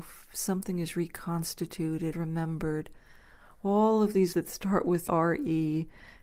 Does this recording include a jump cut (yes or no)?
yes